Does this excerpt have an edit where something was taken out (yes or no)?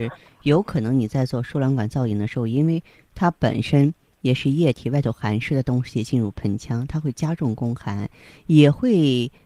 no